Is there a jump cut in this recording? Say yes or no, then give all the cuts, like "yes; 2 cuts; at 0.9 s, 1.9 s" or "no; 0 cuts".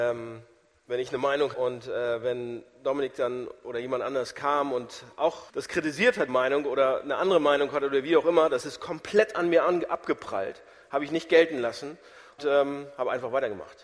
yes; 4 cuts; at 1.5 s, 5.5 s, 6.3 s, 12.4 s